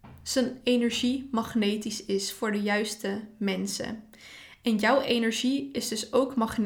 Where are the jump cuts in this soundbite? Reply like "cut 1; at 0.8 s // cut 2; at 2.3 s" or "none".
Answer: none